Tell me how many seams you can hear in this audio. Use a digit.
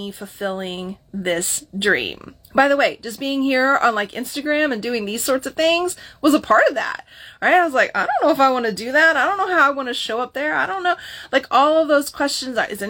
1